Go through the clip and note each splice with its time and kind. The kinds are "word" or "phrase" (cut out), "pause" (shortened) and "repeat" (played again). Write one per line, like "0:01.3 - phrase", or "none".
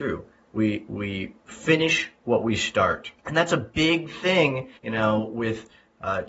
0:03.2 - pause
0:04.8 - pause